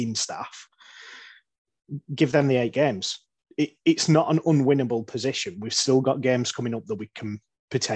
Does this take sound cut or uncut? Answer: uncut